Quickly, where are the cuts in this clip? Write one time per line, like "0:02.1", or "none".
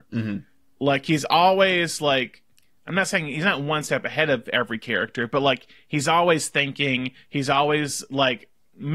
none